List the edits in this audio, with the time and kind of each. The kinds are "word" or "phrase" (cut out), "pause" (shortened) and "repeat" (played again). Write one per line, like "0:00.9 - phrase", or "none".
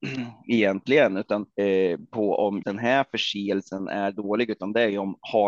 0:01.5 - pause
0:02.6 - word